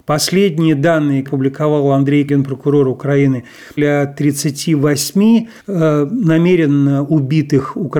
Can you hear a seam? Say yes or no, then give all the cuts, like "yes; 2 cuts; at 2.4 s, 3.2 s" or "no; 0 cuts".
yes; 4 cuts; at 1.3 s, 2.3 s, 3.8 s, 5.6 s